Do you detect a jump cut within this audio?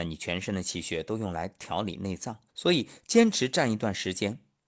yes; 1 cut; at 2.5 s

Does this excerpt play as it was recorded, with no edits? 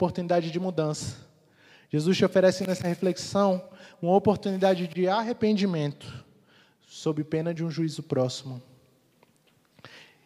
yes; 0 cuts

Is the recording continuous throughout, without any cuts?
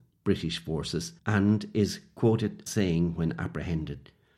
no; 2 cuts; at 1.2 s, 2.7 s

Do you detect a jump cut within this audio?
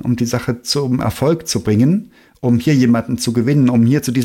no; 0 cuts

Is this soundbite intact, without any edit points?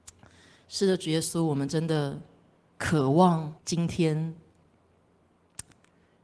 no; 1 cut; at 3.6 s

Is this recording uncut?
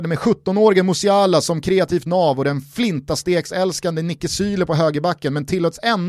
yes; 0 cuts

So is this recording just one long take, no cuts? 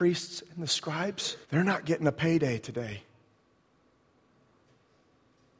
no; 1 cut; at 1.4 s

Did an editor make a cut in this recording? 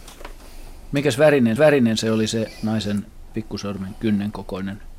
yes; 1 cut; at 1.6 s

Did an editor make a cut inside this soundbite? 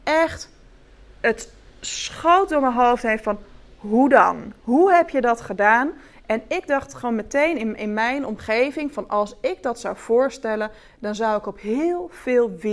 no; 0 cuts

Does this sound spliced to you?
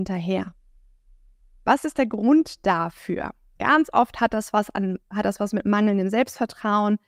no; 0 cuts

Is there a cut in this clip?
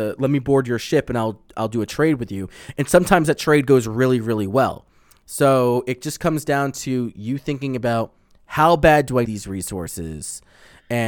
yes; 1 cut; at 9.3 s

